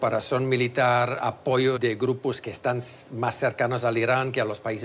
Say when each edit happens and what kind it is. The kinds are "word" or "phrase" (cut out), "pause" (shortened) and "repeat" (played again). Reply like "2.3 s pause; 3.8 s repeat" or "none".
1.8 s word